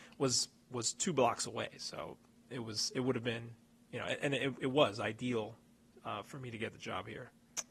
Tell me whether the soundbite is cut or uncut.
uncut